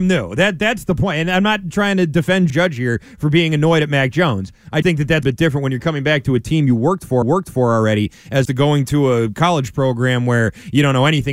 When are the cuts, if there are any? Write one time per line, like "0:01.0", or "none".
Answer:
0:02.5
0:04.8
0:05.2
0:07.2
0:08.4

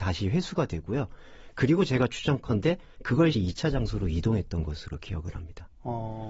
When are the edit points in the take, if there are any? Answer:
0:03.3

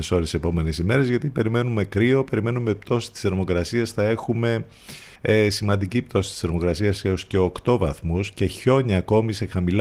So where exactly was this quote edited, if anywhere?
0:05.2

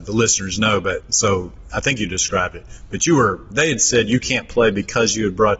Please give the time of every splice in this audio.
none

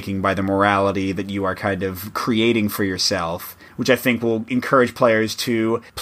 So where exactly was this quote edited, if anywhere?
none

